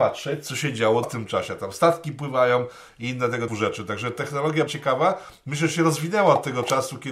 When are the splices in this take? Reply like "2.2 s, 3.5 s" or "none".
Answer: 1.0 s, 3.5 s, 4.7 s

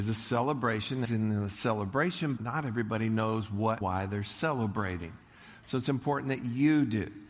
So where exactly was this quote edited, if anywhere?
1.0 s, 2.4 s, 3.8 s

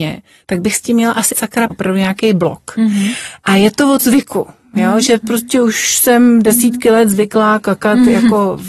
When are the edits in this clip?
1.3 s, 1.7 s, 4.0 s

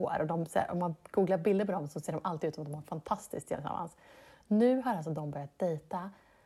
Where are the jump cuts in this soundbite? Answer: none

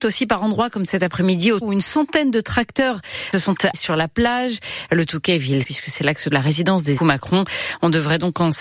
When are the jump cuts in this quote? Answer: 1.6 s, 3.3 s, 3.7 s, 5.6 s, 6.3 s, 7.0 s

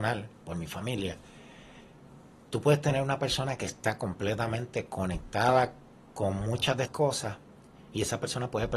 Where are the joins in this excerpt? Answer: 6.9 s

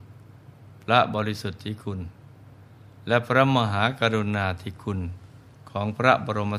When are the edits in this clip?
none

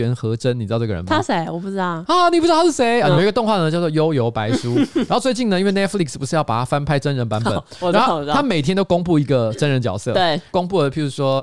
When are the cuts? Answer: none

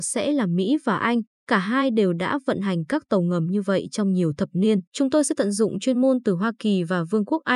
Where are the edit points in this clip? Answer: 4.9 s

